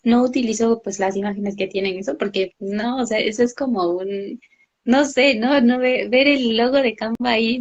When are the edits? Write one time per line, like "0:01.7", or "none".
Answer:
none